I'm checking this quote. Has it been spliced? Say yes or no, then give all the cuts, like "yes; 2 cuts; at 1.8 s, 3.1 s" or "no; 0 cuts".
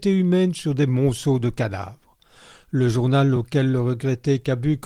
no; 0 cuts